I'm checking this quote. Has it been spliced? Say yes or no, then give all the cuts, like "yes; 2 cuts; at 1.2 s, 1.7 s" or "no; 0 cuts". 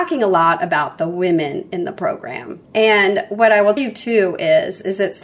yes; 2 cuts; at 2.6 s, 3.8 s